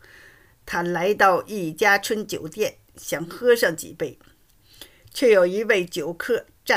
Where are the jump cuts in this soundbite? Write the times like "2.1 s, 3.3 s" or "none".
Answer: none